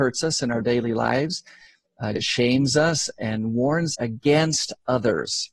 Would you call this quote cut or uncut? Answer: cut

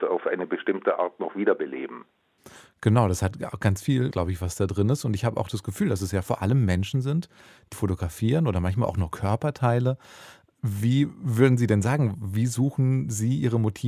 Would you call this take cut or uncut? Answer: cut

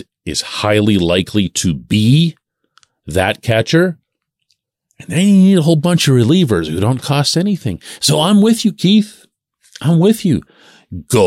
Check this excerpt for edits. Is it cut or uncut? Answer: uncut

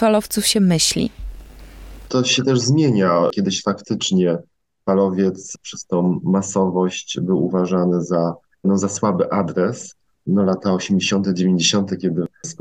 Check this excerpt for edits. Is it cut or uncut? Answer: uncut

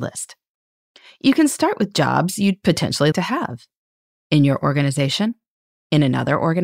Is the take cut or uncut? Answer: cut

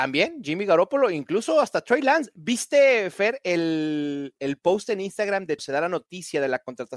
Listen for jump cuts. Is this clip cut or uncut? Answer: cut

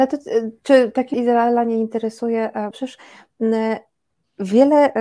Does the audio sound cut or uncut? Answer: cut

